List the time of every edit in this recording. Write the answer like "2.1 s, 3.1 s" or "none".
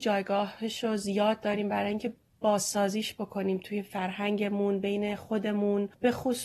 none